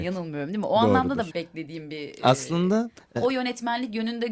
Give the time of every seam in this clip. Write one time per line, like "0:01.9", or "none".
0:01.3
0:03.2